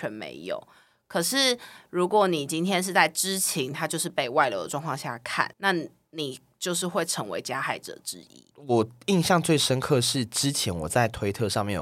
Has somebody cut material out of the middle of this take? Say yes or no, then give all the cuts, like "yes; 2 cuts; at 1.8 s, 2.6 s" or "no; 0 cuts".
yes; 1 cut; at 5.5 s